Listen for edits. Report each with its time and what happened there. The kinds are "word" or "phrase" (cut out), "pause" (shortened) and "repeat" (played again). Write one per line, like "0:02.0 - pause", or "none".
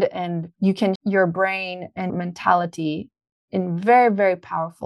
0:01.0 - word
0:02.1 - word